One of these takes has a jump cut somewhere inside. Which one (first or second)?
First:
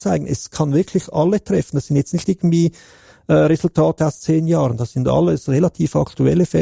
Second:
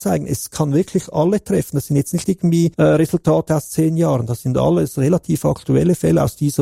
second